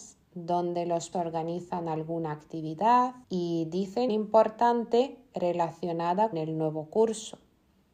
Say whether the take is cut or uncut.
cut